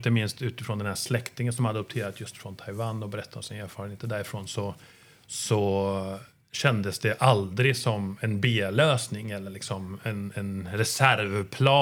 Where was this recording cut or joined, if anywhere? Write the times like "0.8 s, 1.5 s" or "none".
none